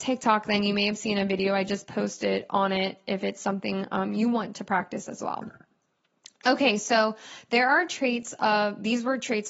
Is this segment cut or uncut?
uncut